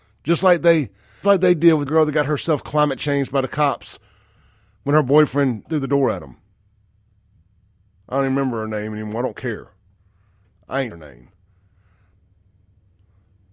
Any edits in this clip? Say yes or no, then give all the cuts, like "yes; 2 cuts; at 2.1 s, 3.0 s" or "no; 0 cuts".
yes; 4 cuts; at 1.2 s, 1.9 s, 5.6 s, 10.9 s